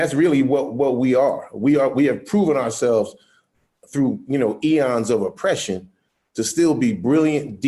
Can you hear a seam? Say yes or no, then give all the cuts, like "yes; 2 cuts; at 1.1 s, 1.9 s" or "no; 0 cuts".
no; 0 cuts